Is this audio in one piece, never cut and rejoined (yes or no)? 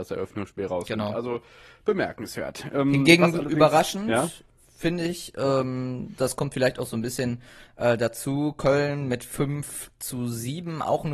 yes